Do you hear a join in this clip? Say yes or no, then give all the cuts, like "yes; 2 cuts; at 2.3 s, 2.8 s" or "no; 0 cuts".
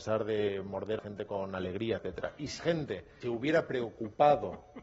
yes; 4 cuts; at 1.0 s, 2.0 s, 2.6 s, 3.2 s